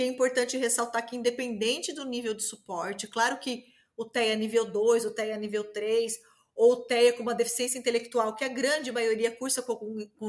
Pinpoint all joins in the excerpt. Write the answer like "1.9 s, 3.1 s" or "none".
none